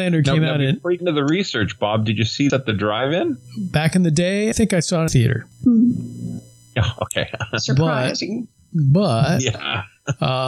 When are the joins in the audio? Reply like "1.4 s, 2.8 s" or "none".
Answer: 1.0 s, 2.5 s, 4.5 s, 5.1 s